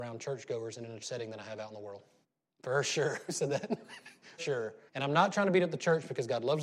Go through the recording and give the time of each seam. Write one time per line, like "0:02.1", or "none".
0:01.0
0:02.2
0:04.4
0:04.9